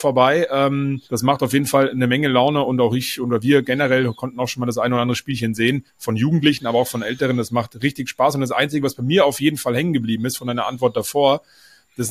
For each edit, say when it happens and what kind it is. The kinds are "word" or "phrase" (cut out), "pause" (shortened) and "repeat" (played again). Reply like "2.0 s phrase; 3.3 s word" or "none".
1.0 s pause; 5.9 s pause